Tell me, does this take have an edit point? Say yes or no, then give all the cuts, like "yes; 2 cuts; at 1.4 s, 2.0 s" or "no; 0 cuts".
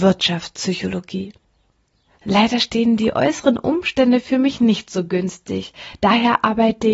no; 0 cuts